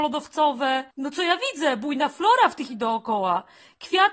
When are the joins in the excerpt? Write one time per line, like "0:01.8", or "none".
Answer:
0:00.9
0:02.7